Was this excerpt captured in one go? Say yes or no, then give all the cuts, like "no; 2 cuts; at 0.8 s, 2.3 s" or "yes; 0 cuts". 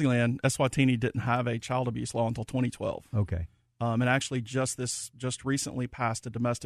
yes; 0 cuts